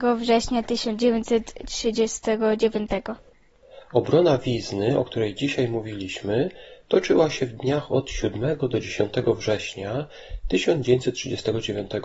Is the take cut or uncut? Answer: uncut